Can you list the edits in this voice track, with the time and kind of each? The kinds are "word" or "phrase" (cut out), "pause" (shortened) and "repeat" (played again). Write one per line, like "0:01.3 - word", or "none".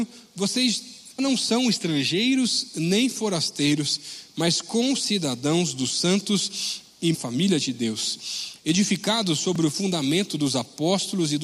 0:01.2 - word
0:07.1 - phrase